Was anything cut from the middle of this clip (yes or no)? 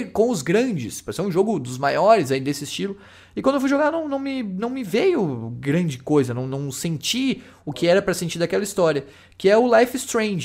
no